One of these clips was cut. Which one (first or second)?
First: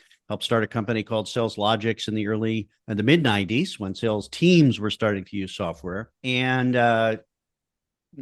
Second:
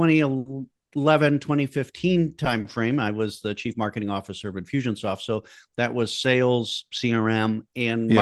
first